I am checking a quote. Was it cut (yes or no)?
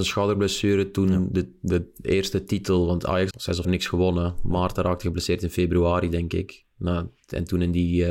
yes